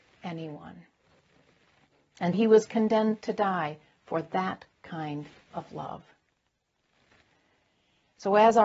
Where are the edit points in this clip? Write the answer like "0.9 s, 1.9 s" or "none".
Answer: 2.3 s